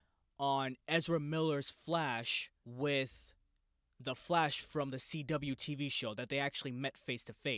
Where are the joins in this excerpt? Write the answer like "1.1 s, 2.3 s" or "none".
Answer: 2.6 s